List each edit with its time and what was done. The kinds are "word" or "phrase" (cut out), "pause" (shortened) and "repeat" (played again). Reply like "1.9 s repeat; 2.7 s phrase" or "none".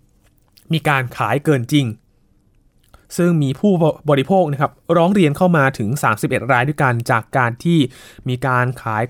none